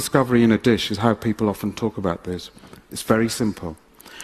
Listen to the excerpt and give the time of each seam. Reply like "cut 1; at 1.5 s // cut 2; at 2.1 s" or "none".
none